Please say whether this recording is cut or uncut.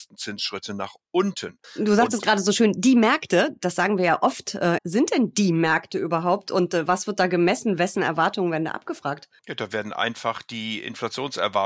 cut